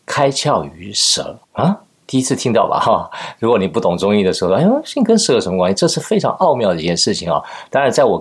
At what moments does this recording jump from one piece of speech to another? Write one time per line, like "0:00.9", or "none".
0:01.4